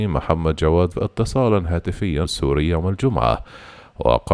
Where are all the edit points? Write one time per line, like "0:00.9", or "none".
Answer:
0:00.9
0:02.2